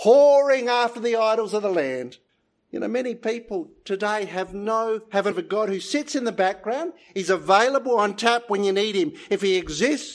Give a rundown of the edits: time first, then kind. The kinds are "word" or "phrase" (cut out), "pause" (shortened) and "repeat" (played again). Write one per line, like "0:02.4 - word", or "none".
0:02.3 - pause
0:05.3 - word